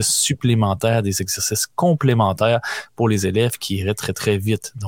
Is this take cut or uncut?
uncut